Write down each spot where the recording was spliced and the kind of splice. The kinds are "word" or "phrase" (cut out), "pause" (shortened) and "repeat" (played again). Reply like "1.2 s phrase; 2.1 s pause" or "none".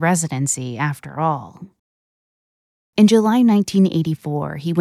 none